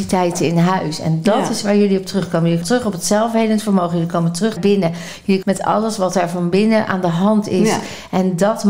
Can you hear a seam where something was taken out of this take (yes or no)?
yes